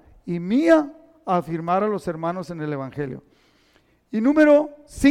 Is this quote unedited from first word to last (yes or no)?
yes